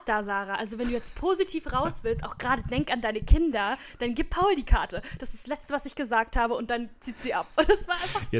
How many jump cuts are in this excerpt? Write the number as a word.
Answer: zero